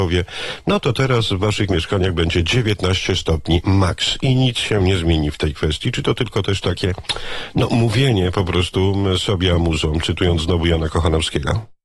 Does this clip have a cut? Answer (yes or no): no